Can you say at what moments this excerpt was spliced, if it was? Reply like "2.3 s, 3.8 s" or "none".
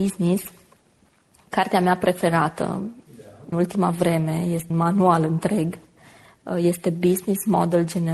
3.5 s, 4.7 s